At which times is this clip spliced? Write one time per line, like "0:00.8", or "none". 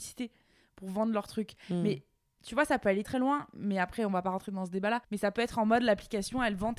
0:03.0
0:05.0